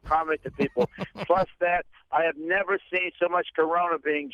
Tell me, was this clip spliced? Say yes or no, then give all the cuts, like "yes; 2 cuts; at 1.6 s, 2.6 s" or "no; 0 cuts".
no; 0 cuts